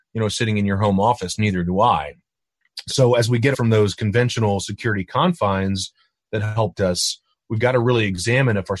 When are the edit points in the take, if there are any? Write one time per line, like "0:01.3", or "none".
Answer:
0:03.5
0:06.7